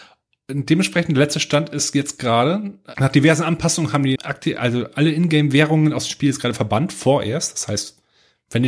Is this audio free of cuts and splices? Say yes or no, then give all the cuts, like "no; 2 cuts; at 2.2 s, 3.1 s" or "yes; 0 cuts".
no; 2 cuts; at 2.9 s, 4.2 s